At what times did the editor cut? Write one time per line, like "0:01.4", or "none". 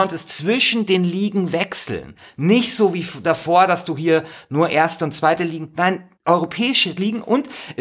0:06.2